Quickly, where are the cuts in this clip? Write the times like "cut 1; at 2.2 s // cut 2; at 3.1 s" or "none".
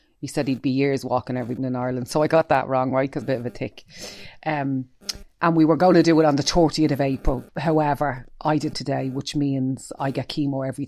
cut 1; at 1.6 s // cut 2; at 3.2 s // cut 3; at 5.3 s // cut 4; at 7.5 s // cut 5; at 8.7 s